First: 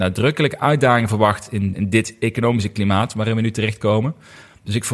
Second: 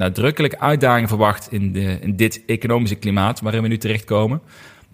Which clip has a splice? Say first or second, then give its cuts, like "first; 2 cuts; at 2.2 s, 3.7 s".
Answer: first; 1 cut; at 1.7 s